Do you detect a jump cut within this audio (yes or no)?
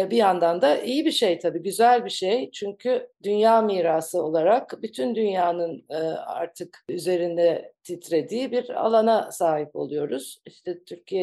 no